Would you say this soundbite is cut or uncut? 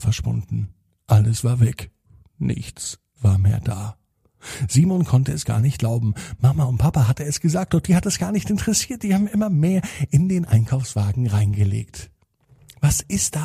uncut